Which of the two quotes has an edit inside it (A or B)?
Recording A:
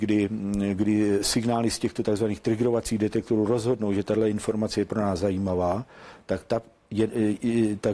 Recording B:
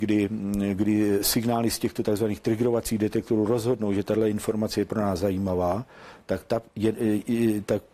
B